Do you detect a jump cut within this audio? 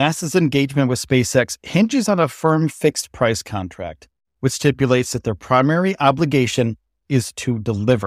no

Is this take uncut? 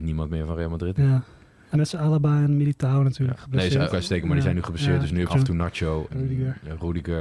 no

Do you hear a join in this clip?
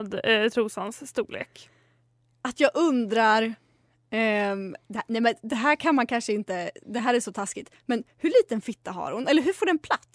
no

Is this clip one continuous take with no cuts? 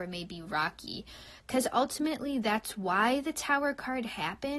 yes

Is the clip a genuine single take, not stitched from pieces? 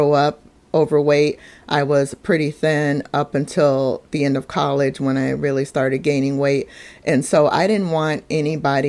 yes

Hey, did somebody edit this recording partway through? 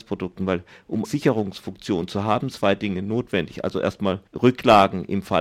yes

